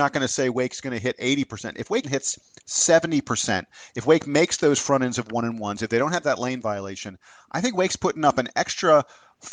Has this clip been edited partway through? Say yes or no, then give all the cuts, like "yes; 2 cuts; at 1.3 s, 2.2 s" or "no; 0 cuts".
yes; 1 cut; at 2.0 s